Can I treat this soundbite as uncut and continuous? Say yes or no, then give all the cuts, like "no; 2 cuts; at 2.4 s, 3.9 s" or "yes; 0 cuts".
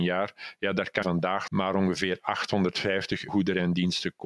no; 3 cuts; at 1.0 s, 1.5 s, 3.3 s